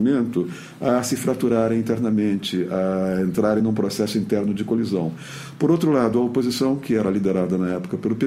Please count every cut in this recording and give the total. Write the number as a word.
zero